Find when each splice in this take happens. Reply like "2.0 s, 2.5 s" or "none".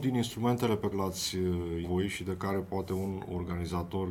0.9 s, 1.8 s